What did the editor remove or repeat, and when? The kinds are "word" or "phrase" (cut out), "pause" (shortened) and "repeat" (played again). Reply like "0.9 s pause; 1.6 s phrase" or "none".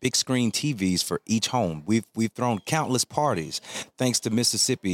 none